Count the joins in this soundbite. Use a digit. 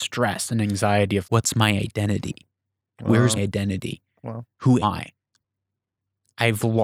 3